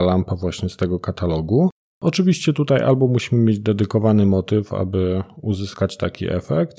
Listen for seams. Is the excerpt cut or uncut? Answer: uncut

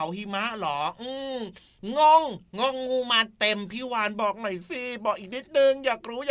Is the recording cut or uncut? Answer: uncut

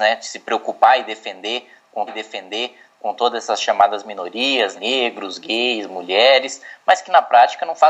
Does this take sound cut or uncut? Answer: cut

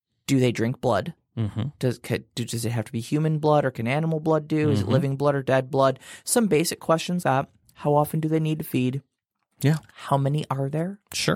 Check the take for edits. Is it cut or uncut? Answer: cut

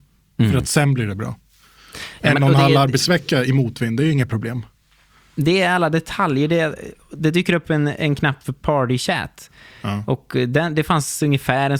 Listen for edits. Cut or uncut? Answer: uncut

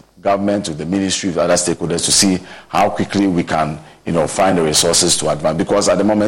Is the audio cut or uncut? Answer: uncut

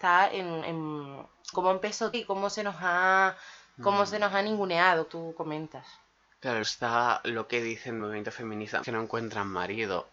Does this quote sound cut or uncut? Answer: cut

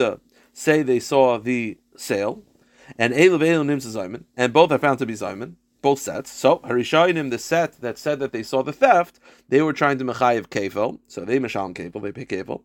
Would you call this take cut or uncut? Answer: uncut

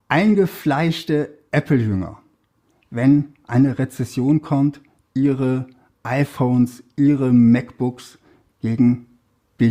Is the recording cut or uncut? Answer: uncut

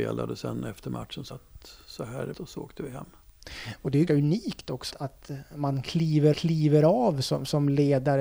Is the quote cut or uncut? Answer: cut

